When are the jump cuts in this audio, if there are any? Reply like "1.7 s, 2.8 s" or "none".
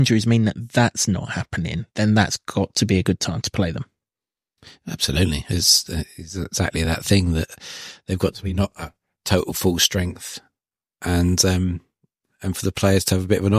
none